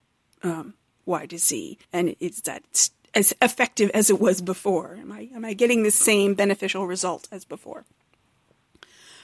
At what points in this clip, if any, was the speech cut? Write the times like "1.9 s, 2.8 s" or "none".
1.8 s